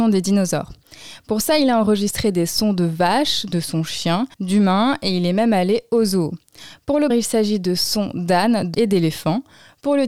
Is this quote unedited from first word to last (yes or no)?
no